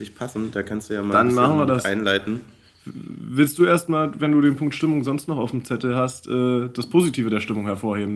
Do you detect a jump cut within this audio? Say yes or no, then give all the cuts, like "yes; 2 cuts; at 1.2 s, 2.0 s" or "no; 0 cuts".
no; 0 cuts